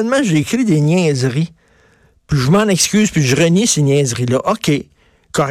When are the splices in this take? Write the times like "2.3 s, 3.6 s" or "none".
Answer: none